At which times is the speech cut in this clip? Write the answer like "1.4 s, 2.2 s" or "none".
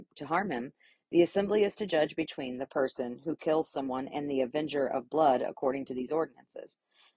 none